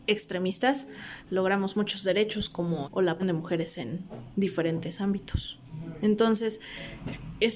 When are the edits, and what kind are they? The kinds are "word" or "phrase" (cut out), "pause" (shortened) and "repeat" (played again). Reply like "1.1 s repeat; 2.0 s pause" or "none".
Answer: 2.8 s phrase; 3.2 s word